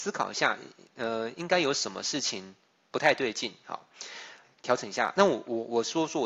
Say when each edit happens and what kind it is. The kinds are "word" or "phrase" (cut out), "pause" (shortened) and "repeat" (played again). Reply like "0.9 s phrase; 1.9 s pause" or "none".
4.4 s word